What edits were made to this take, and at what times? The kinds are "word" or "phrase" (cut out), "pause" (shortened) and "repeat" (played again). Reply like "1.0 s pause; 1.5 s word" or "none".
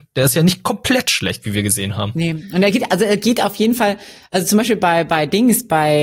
none